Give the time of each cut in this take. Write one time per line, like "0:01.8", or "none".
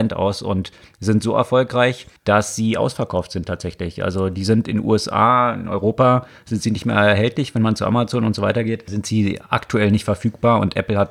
0:02.2